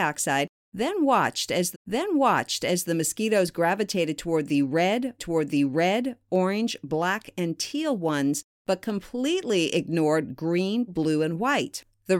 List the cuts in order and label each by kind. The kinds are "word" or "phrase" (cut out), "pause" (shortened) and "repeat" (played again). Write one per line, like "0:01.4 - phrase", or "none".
0:01.7 - repeat
0:05.2 - repeat
0:10.9 - word